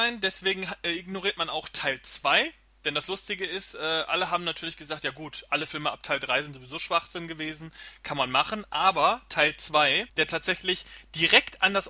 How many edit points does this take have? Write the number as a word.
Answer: one